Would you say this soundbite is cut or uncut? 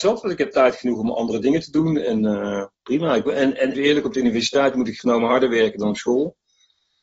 cut